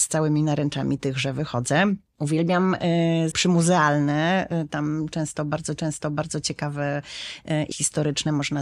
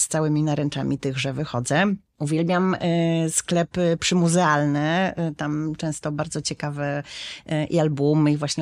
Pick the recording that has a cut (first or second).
first